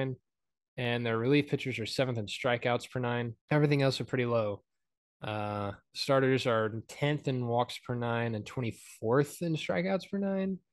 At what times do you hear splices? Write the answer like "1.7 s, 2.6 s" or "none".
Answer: 3.4 s, 5.8 s